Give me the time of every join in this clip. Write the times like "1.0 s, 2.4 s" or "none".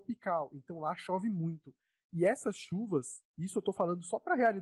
3.3 s